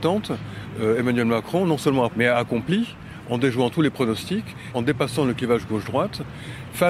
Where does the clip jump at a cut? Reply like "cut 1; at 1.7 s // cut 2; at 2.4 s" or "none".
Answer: cut 1; at 2.1 s // cut 2; at 4.7 s